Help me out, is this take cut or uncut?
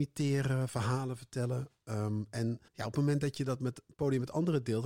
cut